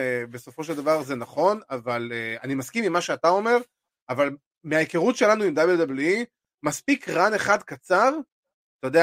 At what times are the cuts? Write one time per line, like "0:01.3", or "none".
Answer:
none

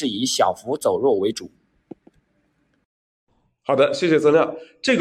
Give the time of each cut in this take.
none

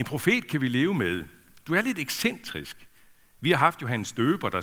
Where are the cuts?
none

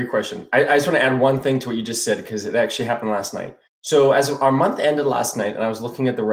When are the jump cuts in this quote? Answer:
0:03.7

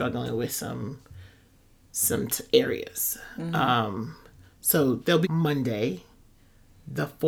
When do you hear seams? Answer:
0:05.2

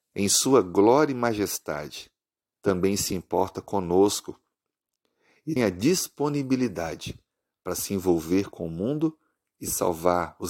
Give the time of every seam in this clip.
0:05.6

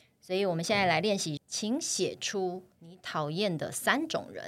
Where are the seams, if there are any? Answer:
0:01.4

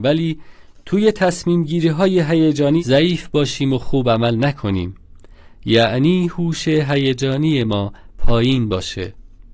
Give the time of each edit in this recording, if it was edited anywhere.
none

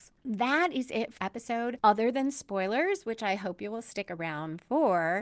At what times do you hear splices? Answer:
0:01.2

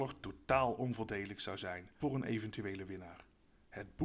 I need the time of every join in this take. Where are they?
0:02.0

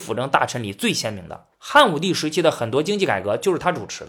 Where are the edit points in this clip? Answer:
0:01.5

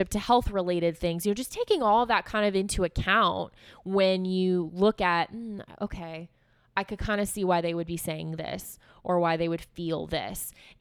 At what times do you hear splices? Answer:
none

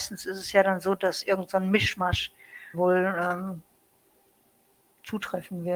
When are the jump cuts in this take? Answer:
0:02.7

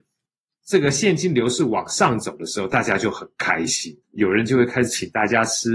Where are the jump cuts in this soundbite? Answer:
0:04.0

